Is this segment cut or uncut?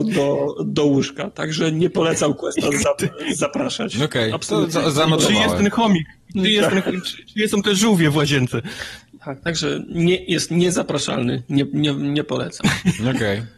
uncut